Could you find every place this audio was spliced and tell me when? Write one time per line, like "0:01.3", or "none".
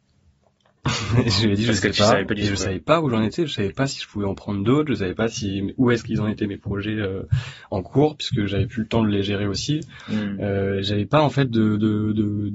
none

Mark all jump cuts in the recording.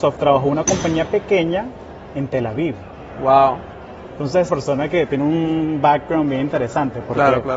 0:04.5

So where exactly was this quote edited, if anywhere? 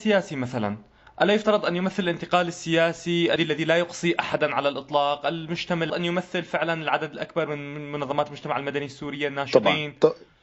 0:03.4
0:05.9

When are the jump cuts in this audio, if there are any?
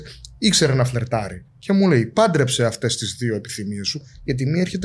0:01.5

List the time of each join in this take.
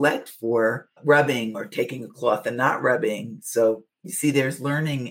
0:01.0

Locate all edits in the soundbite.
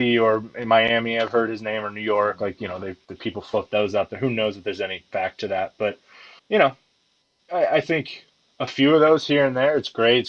0:06.4

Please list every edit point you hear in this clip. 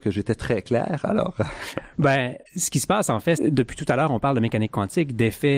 0:02.5
0:03.4

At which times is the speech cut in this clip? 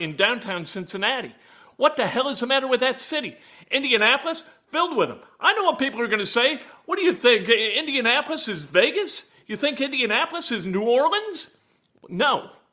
none

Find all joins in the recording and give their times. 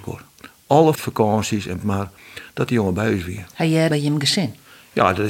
0:00.9
0:01.8
0:03.9

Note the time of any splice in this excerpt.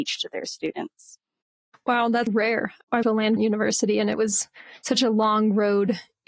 0:02.3
0:03.0
0:03.4

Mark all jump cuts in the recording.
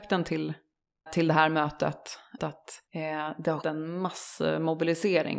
0:01.1
0:02.4
0:02.9
0:03.6

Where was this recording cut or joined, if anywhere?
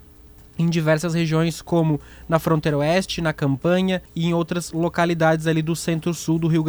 0:04.1

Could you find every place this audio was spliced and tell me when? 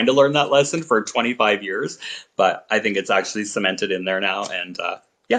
none

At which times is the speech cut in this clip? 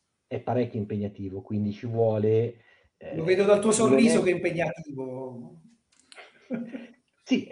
none

